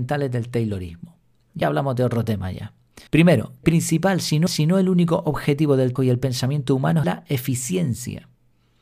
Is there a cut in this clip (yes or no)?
yes